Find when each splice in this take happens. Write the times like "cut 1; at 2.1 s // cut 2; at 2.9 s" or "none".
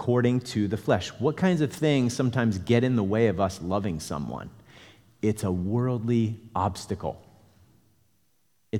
none